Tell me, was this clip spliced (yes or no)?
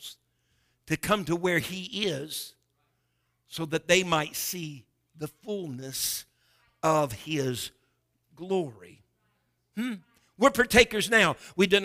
no